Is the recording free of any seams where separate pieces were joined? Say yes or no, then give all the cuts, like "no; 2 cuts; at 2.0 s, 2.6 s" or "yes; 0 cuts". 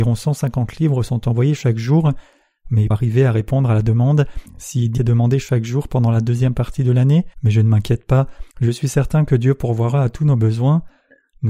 no; 5 cuts; at 2.9 s, 4.5 s, 5.0 s, 7.3 s, 8.5 s